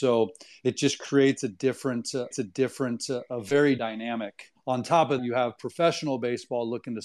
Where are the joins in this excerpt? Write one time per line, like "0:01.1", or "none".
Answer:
0:02.3
0:03.8
0:04.6
0:05.2